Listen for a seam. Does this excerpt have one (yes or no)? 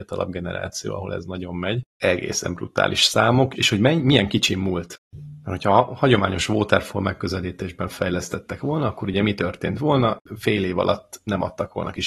yes